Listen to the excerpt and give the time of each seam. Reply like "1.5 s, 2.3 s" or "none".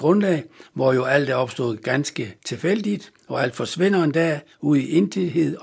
2.4 s